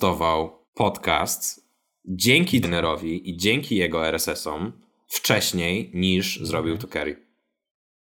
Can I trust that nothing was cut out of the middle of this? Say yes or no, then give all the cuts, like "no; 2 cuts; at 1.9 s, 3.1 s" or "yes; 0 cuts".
no; 1 cut; at 2.6 s